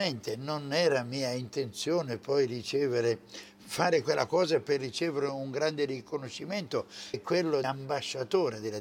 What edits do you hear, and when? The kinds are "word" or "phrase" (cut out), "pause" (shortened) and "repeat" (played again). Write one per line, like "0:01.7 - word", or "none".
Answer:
0:07.1 - word
0:07.6 - word